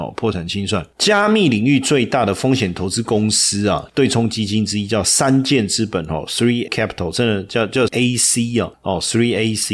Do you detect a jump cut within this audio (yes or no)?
yes